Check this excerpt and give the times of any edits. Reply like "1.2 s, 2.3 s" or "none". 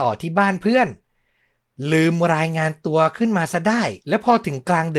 4.0 s